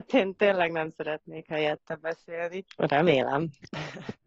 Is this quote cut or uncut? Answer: uncut